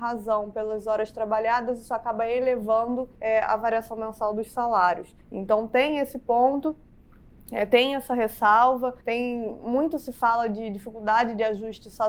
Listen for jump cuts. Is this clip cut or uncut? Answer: cut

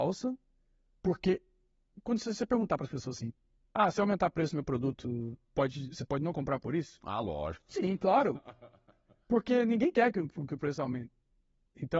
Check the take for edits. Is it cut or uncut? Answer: uncut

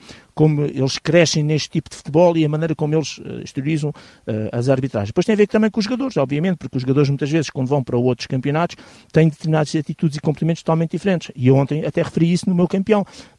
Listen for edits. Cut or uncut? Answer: uncut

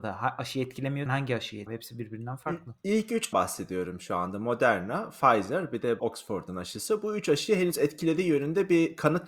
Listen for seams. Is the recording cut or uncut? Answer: cut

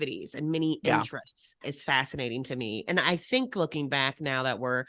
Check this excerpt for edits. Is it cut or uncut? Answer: cut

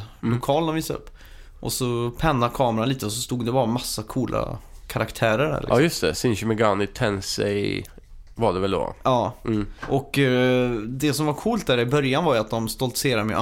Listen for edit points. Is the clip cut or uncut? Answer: cut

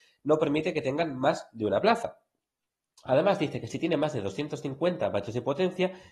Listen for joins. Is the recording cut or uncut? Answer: uncut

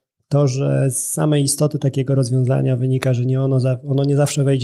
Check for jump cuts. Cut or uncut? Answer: uncut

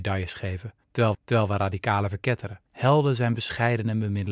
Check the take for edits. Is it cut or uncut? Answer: cut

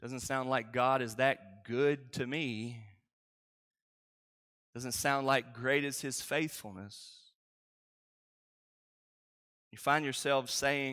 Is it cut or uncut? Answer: uncut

